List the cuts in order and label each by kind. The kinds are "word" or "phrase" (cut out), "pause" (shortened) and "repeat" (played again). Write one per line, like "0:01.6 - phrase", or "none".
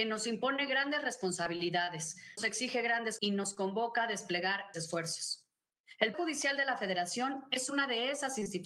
0:02.4 - word
0:03.2 - word
0:04.7 - word
0:06.1 - word